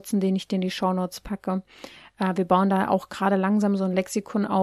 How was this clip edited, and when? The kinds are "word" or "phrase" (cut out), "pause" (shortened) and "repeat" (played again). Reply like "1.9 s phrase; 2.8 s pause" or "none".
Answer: none